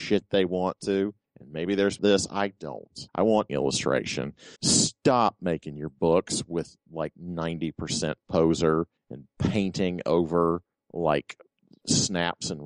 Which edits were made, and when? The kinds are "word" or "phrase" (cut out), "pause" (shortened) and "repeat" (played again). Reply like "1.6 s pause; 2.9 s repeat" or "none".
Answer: 2.0 s phrase; 3.1 s pause; 3.5 s phrase; 4.5 s pause